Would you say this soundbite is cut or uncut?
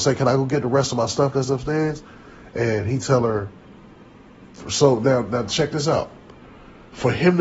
uncut